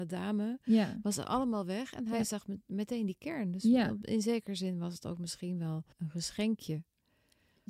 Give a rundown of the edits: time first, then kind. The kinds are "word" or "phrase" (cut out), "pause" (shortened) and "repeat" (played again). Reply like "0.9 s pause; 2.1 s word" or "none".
5.9 s pause